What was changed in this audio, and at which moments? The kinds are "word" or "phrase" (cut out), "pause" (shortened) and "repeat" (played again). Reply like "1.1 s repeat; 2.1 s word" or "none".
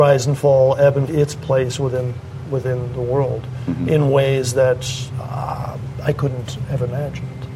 1.1 s phrase